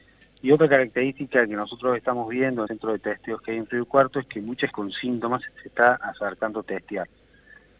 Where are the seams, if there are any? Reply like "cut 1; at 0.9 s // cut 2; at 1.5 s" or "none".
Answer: cut 1; at 2.7 s // cut 2; at 4.7 s // cut 3; at 5.5 s